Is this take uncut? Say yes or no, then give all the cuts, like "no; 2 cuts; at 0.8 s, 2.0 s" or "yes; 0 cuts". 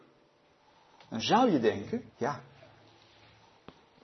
no; 1 cut; at 2.1 s